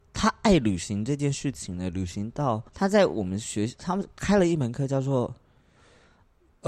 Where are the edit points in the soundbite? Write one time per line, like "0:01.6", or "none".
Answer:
0:02.7